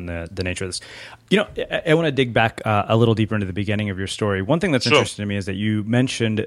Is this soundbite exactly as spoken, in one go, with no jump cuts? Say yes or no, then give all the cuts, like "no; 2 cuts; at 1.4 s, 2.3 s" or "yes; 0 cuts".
yes; 0 cuts